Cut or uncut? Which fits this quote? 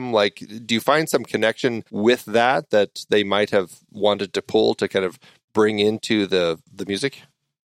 cut